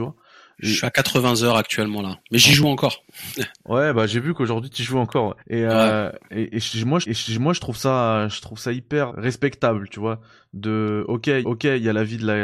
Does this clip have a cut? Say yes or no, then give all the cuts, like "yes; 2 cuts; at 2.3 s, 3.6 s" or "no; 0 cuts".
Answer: yes; 4 cuts; at 5.4 s, 7.0 s, 9.1 s, 11.4 s